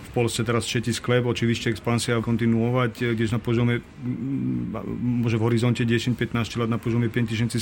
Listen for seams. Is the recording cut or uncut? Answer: cut